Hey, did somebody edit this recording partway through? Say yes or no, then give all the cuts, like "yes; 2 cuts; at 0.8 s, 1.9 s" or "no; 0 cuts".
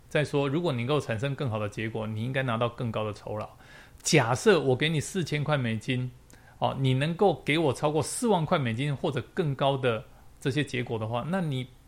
no; 0 cuts